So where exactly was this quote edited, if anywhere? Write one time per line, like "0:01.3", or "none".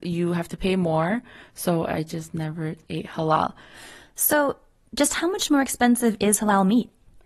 none